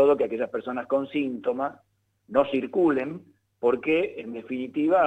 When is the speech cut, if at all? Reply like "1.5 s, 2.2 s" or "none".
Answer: none